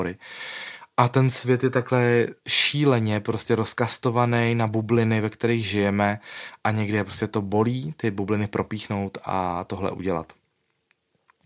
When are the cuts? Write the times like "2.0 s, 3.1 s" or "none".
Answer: 2.4 s